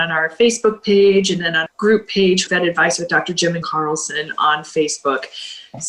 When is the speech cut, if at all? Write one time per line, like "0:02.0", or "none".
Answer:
0:01.7
0:02.5
0:03.6